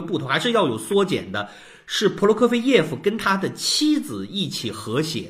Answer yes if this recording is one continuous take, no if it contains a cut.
yes